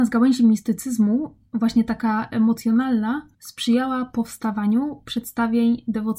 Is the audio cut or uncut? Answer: cut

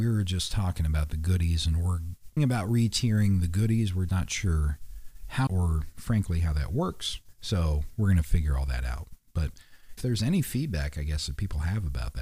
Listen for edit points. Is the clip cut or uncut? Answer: cut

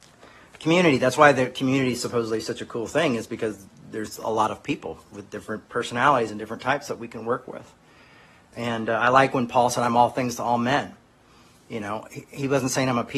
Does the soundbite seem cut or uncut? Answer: uncut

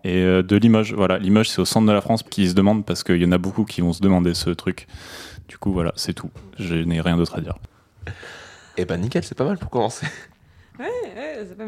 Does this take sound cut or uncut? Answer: cut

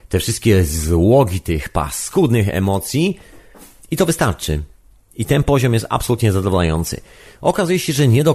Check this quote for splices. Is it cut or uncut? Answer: uncut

